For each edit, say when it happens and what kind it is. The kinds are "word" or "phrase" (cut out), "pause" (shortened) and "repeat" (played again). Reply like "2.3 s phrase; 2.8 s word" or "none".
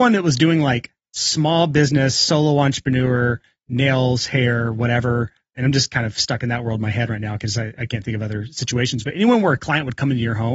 none